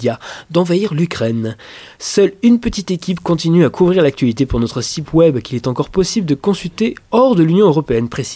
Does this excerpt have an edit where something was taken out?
no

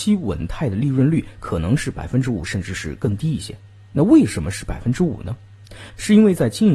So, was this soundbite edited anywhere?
no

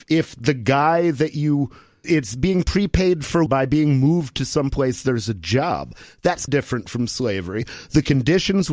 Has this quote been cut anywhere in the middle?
yes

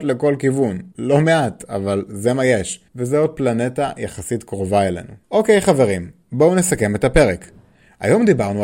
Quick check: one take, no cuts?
no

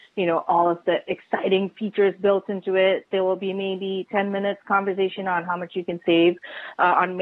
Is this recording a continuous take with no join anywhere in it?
yes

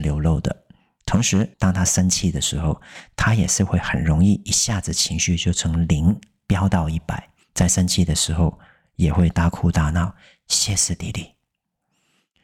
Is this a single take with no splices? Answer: no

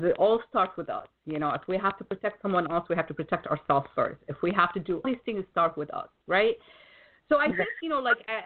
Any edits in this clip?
yes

